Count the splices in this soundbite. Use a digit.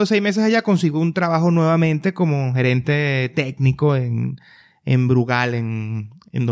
0